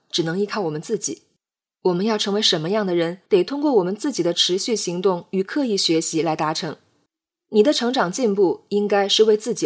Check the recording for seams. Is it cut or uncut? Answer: cut